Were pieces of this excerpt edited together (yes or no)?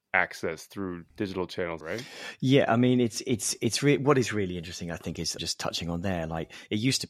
yes